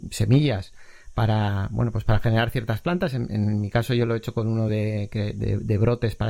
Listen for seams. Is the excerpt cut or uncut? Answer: uncut